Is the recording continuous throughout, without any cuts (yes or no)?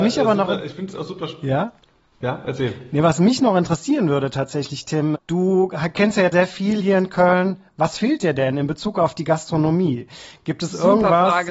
no